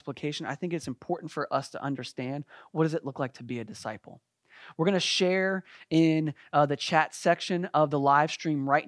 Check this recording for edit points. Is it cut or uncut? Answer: uncut